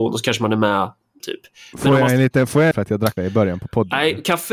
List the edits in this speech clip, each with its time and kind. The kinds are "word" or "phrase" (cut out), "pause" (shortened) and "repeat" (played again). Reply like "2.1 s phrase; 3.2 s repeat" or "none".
1.2 s phrase; 2.7 s phrase; 3.2 s word